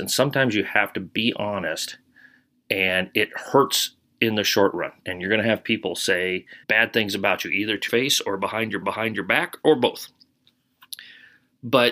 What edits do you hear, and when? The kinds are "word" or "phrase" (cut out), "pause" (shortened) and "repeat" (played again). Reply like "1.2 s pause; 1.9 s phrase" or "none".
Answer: 6.6 s pause; 7.9 s word; 8.8 s repeat